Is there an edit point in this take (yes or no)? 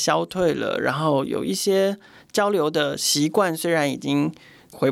no